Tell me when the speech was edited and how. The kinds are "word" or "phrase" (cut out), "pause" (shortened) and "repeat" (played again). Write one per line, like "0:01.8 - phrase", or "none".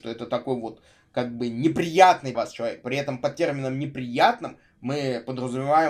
0:02.3 - word